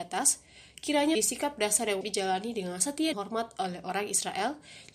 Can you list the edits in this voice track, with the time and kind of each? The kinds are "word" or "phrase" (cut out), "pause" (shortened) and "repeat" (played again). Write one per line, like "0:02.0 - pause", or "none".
0:01.1 - word
0:02.0 - word
0:03.1 - word